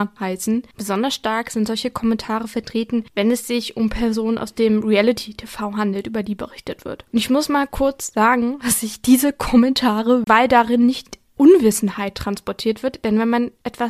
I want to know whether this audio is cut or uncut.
cut